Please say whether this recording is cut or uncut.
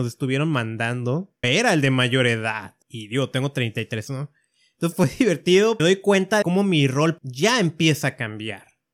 cut